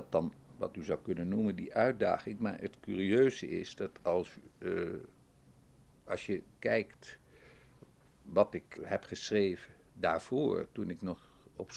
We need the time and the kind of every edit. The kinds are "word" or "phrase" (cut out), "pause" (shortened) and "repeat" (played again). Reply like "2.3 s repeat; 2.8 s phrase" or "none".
8.8 s word